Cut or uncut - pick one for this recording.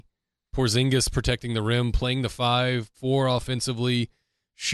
cut